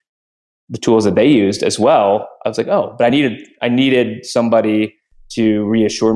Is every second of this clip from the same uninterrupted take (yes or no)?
yes